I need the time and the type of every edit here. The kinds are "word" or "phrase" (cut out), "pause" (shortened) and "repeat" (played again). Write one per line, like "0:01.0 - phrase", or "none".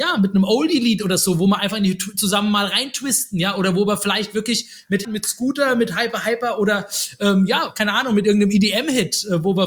0:05.0 - phrase